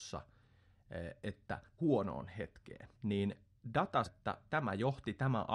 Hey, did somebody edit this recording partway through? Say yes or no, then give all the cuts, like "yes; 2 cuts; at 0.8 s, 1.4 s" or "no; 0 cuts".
yes; 3 cuts; at 1.8 s, 2.9 s, 4.1 s